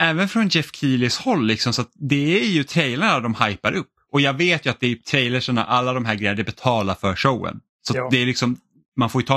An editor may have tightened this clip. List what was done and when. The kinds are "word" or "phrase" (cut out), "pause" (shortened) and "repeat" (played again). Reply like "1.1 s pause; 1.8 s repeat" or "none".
none